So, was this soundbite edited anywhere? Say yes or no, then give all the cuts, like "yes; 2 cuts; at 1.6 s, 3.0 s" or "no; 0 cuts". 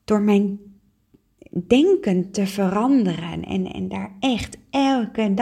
no; 0 cuts